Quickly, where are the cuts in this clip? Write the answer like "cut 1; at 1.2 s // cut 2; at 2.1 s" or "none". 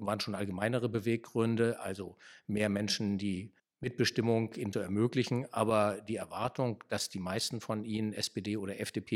cut 1; at 3.6 s // cut 2; at 4.7 s